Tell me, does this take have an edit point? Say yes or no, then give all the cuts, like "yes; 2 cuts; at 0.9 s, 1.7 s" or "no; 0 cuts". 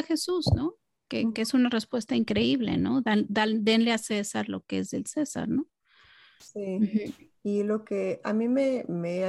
no; 0 cuts